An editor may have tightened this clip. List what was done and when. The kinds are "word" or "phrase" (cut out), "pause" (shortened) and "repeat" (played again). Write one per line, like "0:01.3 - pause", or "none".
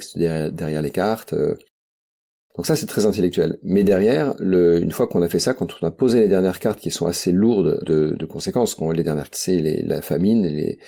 0:07.8 - word
0:09.3 - word